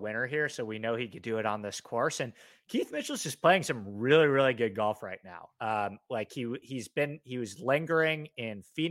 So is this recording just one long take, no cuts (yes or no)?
yes